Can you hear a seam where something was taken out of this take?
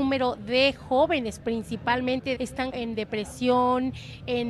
yes; 2 cuts; at 2.3 s, 2.7 s

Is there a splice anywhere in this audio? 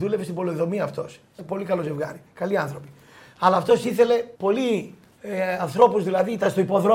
yes; 2 cuts; at 1.4 s, 4.4 s

